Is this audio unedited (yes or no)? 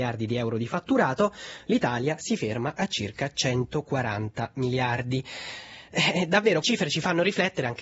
no